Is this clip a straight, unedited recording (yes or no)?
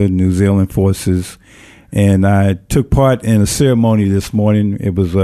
yes